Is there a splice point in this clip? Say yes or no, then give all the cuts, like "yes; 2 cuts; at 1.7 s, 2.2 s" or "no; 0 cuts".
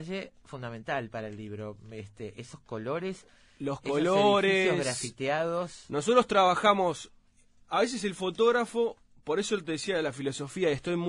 no; 0 cuts